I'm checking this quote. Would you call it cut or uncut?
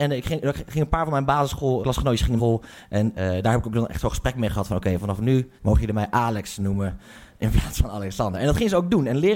cut